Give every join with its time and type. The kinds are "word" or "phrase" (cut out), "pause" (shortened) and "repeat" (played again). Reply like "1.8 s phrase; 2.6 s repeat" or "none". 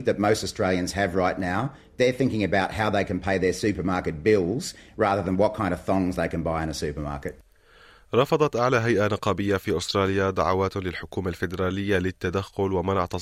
none